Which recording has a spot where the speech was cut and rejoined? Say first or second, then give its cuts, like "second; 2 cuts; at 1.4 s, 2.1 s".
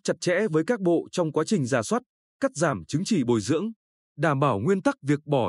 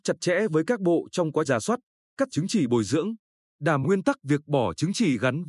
second; 3 cuts; at 1.4 s, 2.3 s, 3.8 s